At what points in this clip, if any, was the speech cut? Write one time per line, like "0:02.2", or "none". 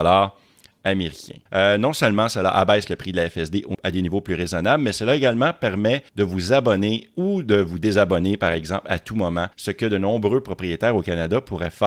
0:01.5
0:03.7
0:06.1
0:09.5